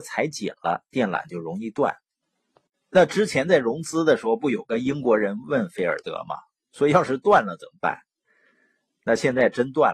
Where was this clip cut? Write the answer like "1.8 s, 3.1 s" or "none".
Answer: 2.2 s